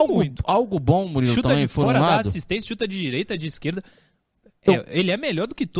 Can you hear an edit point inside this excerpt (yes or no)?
no